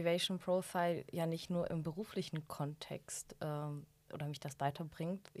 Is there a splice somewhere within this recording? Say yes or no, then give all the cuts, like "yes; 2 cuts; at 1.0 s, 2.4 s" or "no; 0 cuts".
no; 0 cuts